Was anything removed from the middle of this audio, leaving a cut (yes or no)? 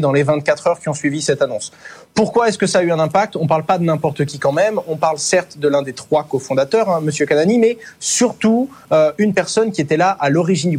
no